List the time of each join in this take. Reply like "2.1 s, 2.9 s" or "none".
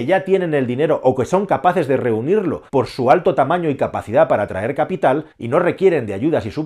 2.7 s, 5.3 s